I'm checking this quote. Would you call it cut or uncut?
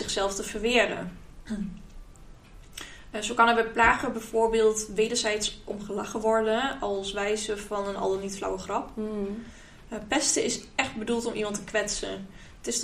uncut